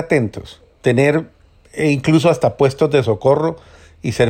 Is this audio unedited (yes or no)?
yes